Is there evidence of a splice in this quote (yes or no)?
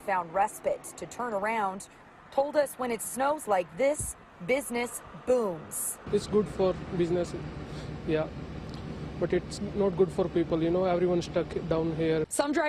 no